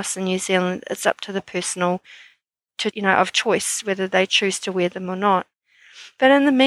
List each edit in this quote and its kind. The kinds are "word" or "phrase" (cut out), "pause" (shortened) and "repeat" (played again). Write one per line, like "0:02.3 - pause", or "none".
0:02.9 - word